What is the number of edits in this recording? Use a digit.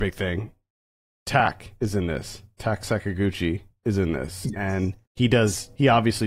1